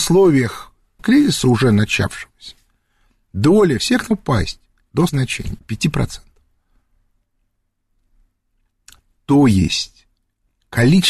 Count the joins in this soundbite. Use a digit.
5